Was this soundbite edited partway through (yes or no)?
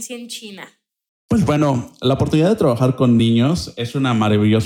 no